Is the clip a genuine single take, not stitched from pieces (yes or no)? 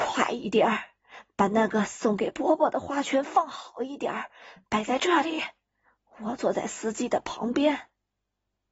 yes